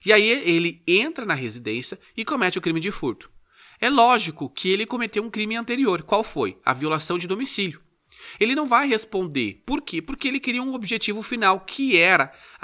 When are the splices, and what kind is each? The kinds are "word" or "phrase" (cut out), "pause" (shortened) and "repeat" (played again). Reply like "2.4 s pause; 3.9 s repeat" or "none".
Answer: none